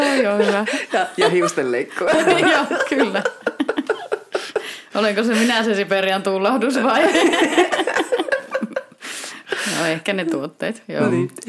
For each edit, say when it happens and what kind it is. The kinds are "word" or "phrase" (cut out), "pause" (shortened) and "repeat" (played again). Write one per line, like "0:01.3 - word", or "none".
none